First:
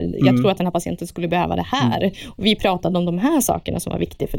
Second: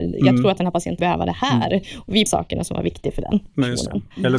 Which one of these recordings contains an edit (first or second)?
second